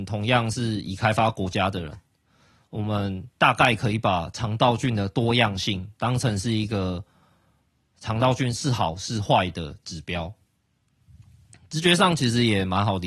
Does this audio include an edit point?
no; 0 cuts

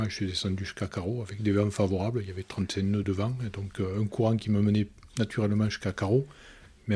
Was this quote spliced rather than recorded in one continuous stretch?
yes; 1 cut; at 3.0 s

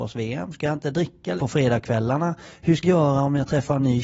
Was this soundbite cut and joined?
yes; 2 cuts; at 1.4 s, 2.8 s

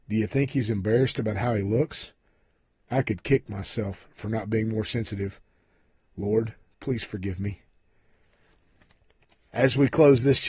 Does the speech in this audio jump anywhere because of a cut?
no; 0 cuts

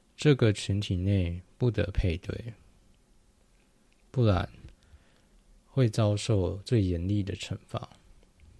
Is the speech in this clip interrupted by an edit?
no; 0 cuts

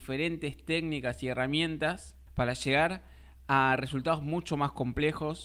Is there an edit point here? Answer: no; 0 cuts

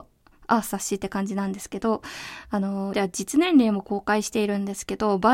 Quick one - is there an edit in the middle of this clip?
yes; 1 cut; at 2.9 s

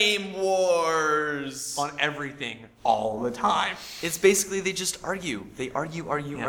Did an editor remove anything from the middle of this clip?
yes; 1 cut; at 2.7 s

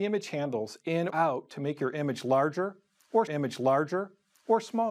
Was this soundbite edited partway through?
yes; 2 cuts; at 1.1 s, 3.3 s

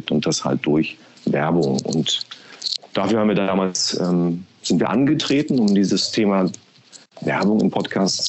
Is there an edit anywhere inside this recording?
no; 0 cuts

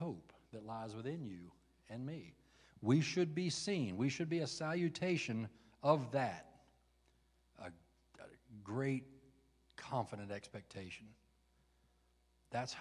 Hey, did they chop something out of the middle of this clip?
no; 0 cuts

